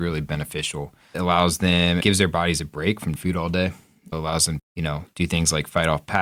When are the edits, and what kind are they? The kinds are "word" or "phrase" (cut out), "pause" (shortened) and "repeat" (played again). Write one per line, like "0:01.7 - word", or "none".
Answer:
0:01.1 - word
0:02.0 - word
0:03.2 - word
0:04.1 - word
0:04.6 - word